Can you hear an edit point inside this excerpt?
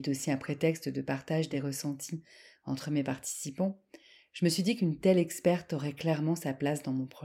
no; 0 cuts

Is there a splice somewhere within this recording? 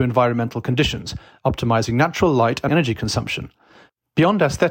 yes; 1 cut; at 2.7 s

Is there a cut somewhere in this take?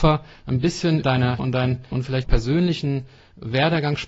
yes; 4 cuts; at 1.0 s, 1.4 s, 1.9 s, 2.2 s

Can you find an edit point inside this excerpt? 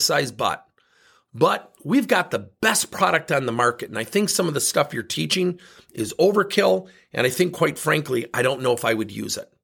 no; 0 cuts

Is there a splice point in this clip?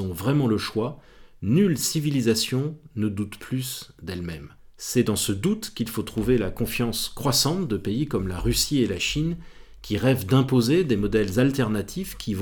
yes; 1 cut; at 4.6 s

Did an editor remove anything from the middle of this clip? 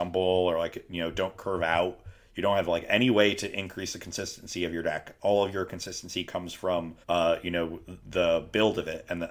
yes; 2 cuts; at 7.0 s, 8.0 s

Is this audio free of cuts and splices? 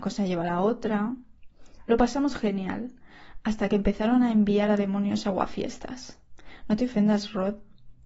yes; 0 cuts

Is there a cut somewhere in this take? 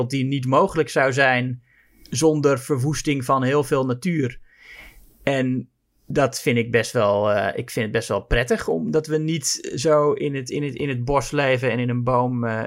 no; 0 cuts

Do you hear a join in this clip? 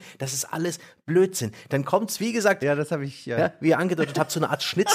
no; 0 cuts

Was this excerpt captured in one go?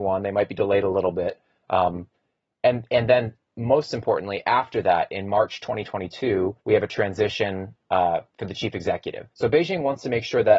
no; 2 cuts; at 6.6 s, 9.3 s

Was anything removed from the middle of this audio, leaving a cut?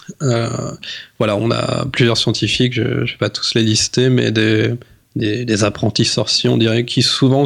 no; 0 cuts

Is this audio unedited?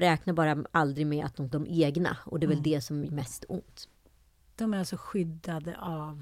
no; 2 cuts; at 1.5 s, 3.1 s

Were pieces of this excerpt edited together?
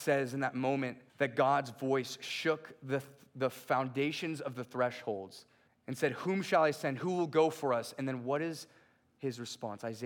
yes; 2 cuts; at 1.1 s, 5.7 s

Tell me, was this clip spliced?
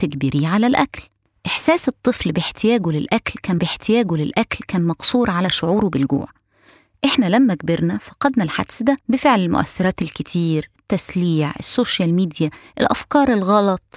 yes; 2 cuts; at 3.6 s, 9.0 s

